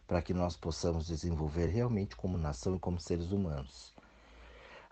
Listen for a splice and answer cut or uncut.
uncut